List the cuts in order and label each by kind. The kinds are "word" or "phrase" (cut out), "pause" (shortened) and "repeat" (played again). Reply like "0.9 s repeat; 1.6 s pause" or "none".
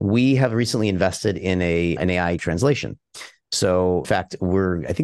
2.0 s word; 2.4 s phrase; 4.0 s word